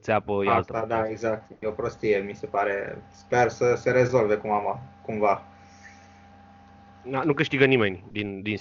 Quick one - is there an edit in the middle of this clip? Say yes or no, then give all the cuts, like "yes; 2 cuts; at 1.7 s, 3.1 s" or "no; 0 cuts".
no; 0 cuts